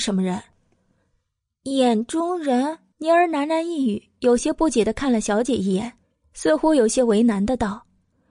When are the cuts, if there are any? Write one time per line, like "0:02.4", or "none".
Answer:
0:02.9
0:06.0